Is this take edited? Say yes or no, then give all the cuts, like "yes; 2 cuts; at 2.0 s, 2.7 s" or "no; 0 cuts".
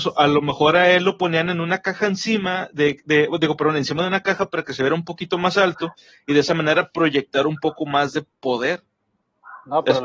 no; 0 cuts